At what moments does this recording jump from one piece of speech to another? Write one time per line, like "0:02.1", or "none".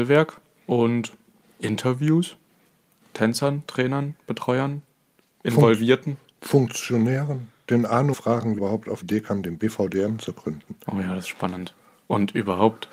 0:03.0
0:08.1
0:08.6
0:09.0